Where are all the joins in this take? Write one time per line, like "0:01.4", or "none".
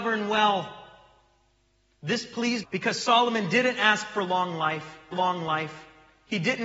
0:02.6
0:05.1